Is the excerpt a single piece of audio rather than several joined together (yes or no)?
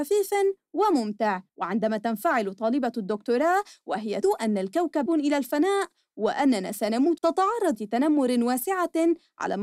no